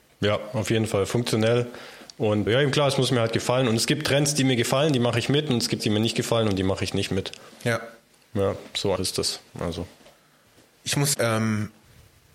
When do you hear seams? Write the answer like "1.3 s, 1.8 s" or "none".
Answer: 2.5 s, 5.8 s, 9.0 s, 11.1 s